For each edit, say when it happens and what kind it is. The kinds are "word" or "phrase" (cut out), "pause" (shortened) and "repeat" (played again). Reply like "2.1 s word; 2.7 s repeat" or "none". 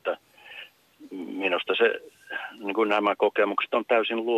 none